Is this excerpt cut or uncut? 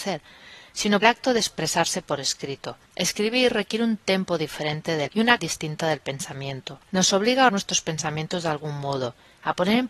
cut